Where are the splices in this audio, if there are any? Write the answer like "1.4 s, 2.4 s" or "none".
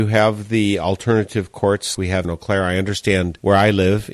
1.9 s, 2.2 s

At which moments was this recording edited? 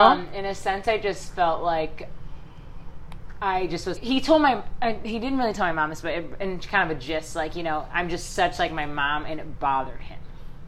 4.0 s

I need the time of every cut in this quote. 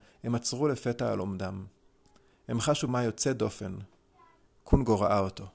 2.9 s, 4.5 s

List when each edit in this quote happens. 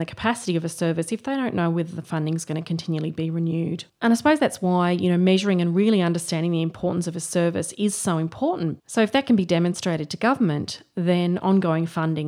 none

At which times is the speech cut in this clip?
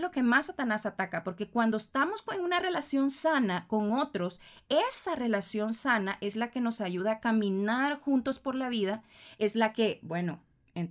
none

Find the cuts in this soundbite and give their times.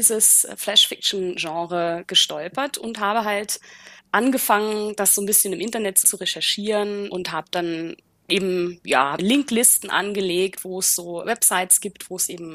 4.0 s, 6.0 s, 8.1 s, 9.2 s, 11.2 s

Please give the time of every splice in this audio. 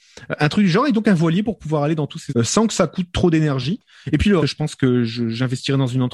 2.3 s, 4.4 s

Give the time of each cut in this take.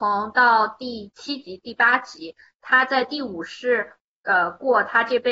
none

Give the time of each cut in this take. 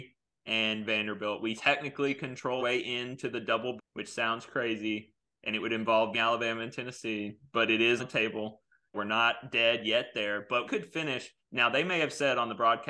1.6 s, 2.6 s, 3.8 s, 6.1 s, 8.0 s, 8.9 s, 10.6 s

